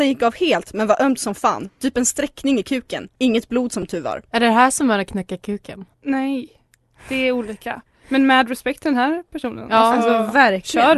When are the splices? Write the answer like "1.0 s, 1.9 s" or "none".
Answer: 3.2 s, 4.3 s, 5.9 s